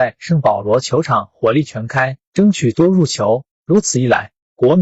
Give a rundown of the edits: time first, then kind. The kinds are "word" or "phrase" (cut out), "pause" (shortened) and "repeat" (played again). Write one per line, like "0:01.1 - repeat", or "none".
0:03.5 - pause